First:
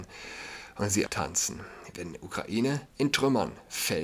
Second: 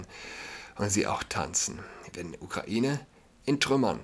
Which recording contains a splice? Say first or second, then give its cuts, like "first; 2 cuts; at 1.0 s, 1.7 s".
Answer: first; 2 cuts; at 1.1 s, 2.9 s